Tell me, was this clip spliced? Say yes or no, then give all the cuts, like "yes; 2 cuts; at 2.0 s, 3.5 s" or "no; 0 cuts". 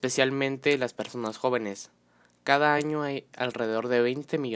no; 0 cuts